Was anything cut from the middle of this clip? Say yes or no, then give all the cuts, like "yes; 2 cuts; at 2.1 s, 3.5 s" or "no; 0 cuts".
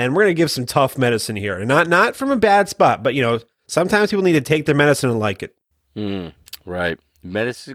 no; 0 cuts